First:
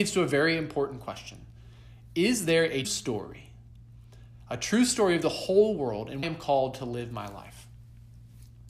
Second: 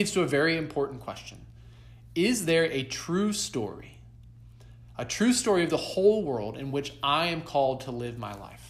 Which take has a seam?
first; 2 cuts; at 2.8 s, 6.2 s

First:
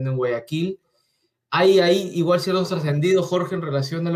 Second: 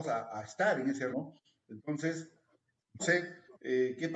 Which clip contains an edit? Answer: second; 2 cuts; at 1.1 s, 3.0 s

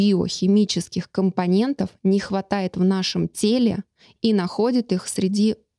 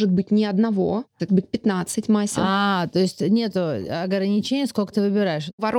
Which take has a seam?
second; 1 cut; at 1.3 s

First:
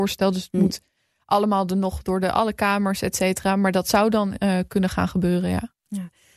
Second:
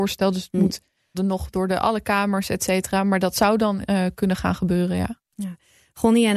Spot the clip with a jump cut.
second; 1 cut; at 1.1 s

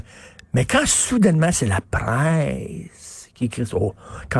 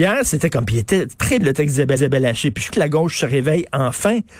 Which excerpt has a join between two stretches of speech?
second; 3 cuts; at 1.4 s, 2.0 s, 2.7 s

